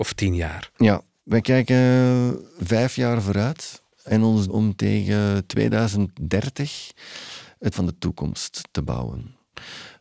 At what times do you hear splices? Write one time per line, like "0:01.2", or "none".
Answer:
0:03.9
0:04.5
0:07.7